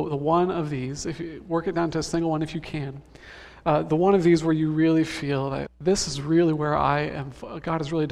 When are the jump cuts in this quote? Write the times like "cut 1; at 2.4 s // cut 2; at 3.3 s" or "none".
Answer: cut 1; at 5.7 s